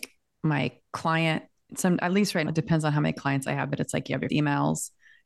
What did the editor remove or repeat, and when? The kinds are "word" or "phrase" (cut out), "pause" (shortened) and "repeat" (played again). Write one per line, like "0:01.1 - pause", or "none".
0:02.5 - word
0:04.3 - word